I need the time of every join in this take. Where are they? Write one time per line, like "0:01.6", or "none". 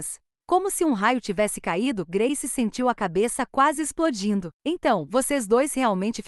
0:04.5